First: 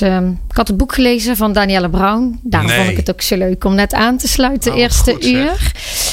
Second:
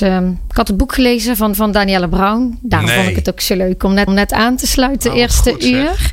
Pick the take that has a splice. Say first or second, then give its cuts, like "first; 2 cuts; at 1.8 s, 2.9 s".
second; 2 cuts; at 1.5 s, 4.1 s